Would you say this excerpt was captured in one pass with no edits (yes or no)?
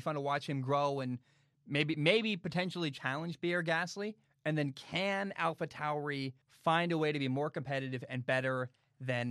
no